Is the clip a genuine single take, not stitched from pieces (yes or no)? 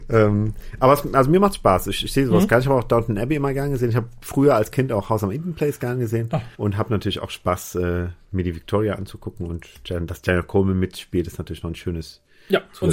no